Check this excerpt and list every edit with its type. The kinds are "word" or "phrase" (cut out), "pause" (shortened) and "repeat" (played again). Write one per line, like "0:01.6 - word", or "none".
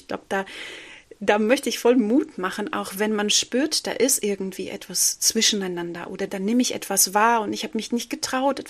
0:06.3 - word